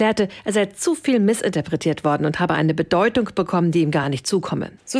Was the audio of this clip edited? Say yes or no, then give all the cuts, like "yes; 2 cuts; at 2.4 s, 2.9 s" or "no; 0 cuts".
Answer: no; 0 cuts